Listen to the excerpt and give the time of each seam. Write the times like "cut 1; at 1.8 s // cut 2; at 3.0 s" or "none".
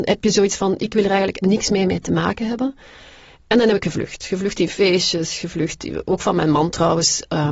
cut 1; at 1.4 s

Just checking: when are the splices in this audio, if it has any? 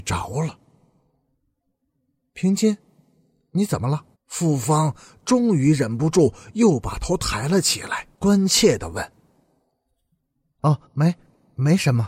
cut 1; at 4.1 s // cut 2; at 8.1 s // cut 3; at 10.8 s

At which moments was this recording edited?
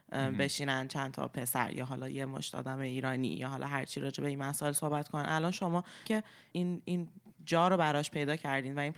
cut 1; at 6.1 s // cut 2; at 6.5 s

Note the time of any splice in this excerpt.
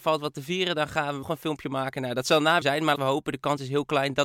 cut 1; at 1.2 s // cut 2; at 2.6 s // cut 3; at 3.0 s

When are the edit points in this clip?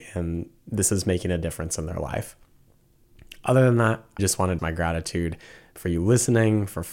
cut 1; at 4.2 s // cut 2; at 4.6 s

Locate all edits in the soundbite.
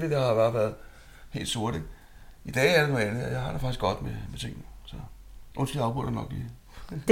cut 1; at 5.5 s

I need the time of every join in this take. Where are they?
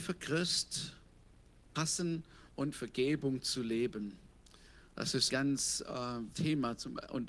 cut 1; at 1.8 s // cut 2; at 2.7 s // cut 3; at 5.3 s // cut 4; at 6.3 s

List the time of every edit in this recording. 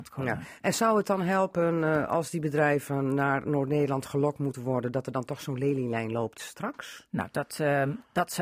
none

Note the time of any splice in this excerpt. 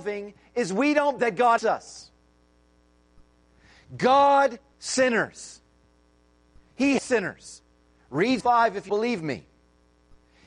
cut 1; at 1.2 s // cut 2; at 1.6 s // cut 3; at 4.7 s // cut 4; at 7.0 s // cut 5; at 8.4 s // cut 6; at 8.9 s

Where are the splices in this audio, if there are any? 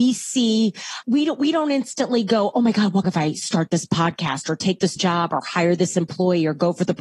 cut 1; at 1.0 s // cut 2; at 3.0 s // cut 3; at 5.0 s

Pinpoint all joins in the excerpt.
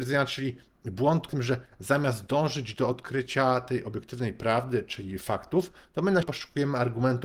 cut 1; at 1.3 s // cut 2; at 6.2 s

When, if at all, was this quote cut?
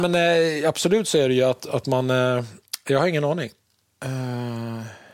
none

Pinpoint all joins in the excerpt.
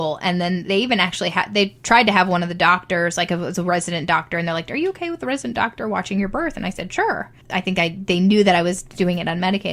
cut 1; at 7.4 s

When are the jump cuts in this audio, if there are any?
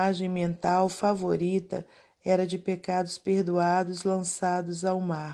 none

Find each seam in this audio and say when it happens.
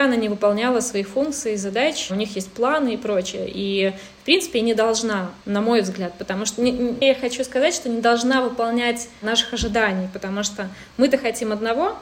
cut 1; at 5.4 s // cut 2; at 7.0 s

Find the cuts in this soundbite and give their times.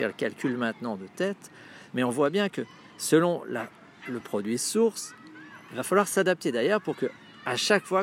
none

